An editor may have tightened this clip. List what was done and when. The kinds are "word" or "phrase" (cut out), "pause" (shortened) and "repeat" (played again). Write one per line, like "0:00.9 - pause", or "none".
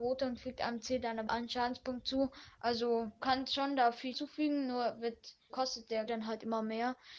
0:01.3 - word
0:03.2 - word
0:04.1 - word
0:05.5 - word
0:06.1 - word